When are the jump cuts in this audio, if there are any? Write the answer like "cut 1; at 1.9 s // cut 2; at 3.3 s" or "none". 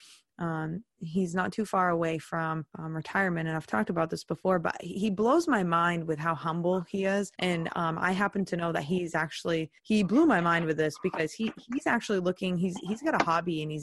cut 1; at 2.7 s // cut 2; at 7.3 s // cut 3; at 9.8 s